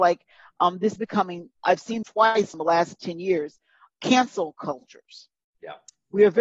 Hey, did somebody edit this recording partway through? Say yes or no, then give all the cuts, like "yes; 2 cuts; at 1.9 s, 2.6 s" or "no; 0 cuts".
yes; 3 cuts; at 1.0 s, 2.0 s, 2.5 s